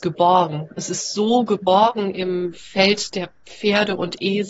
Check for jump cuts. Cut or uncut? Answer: uncut